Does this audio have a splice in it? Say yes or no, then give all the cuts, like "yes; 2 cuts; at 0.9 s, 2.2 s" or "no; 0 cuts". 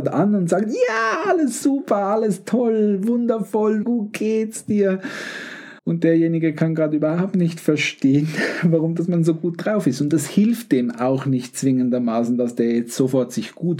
yes; 2 cuts; at 3.8 s, 5.8 s